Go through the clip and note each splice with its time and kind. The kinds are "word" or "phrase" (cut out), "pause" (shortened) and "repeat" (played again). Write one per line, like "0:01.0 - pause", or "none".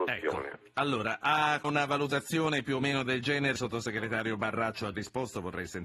0:01.6 - word
0:03.6 - word
0:04.9 - word